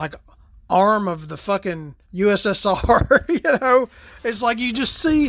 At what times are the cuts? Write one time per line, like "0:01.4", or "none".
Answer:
0:02.0